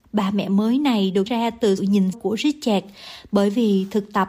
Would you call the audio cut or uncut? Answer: cut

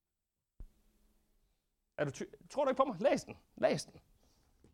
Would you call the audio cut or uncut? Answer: cut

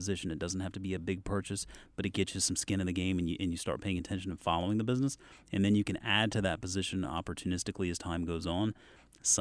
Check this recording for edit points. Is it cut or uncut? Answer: uncut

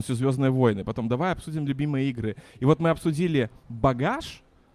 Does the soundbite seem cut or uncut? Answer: uncut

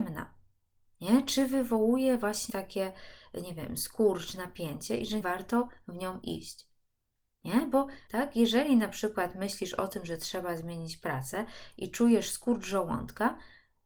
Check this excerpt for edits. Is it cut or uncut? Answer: cut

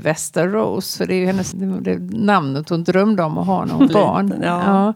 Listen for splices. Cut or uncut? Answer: cut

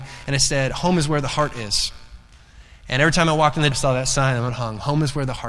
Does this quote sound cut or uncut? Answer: cut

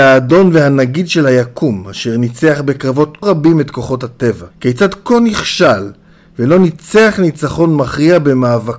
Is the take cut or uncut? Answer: cut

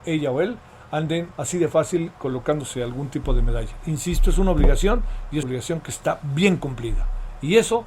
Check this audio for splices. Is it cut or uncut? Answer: cut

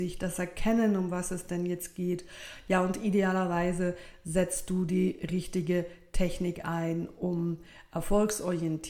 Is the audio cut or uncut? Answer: uncut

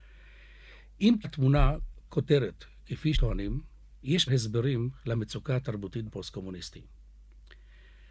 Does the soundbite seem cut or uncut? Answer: cut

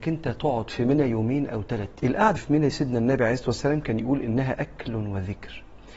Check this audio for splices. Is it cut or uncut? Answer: cut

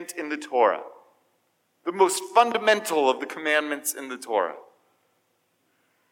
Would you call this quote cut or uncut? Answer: uncut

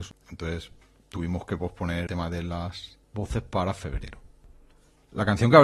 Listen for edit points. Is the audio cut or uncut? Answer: cut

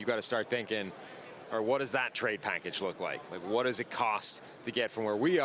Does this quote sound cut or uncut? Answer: uncut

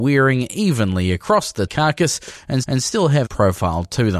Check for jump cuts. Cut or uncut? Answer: cut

